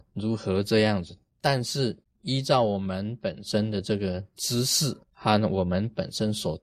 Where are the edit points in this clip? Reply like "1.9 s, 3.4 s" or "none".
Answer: 2.0 s, 5.0 s